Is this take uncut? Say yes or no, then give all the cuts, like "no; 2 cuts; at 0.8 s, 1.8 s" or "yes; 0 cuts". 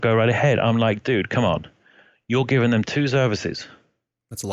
yes; 0 cuts